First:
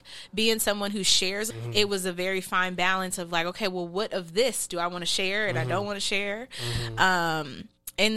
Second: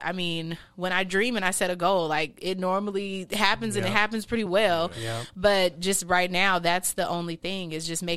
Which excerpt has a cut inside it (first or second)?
first